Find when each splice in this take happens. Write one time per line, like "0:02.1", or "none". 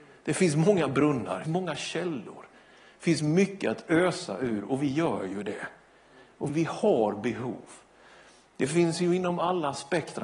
0:01.4
0:06.5